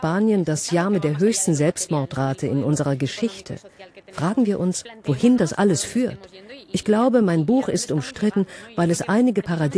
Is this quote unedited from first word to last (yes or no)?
yes